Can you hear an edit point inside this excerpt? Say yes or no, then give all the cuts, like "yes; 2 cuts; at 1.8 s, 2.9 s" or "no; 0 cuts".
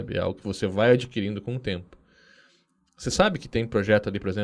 no; 0 cuts